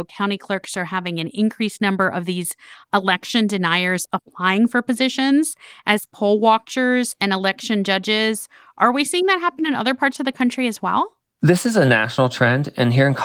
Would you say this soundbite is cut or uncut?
uncut